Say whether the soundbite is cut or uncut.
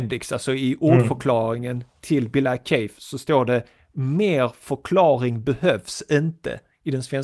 uncut